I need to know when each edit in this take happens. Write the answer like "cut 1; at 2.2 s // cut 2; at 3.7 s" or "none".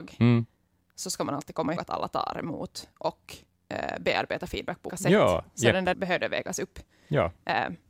cut 1; at 1.8 s // cut 2; at 4.9 s // cut 3; at 5.9 s